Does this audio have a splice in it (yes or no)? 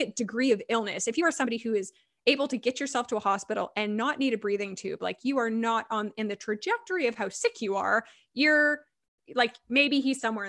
no